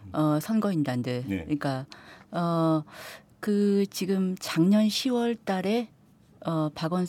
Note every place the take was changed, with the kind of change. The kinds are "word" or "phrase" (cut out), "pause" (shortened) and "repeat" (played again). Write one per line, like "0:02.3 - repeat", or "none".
0:03.4 - word